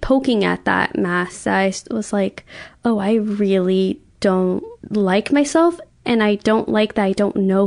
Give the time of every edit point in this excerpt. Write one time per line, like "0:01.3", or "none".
0:04.8